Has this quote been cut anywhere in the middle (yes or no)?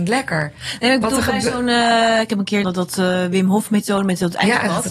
yes